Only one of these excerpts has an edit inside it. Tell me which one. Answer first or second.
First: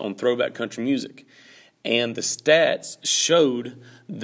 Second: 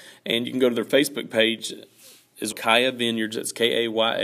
second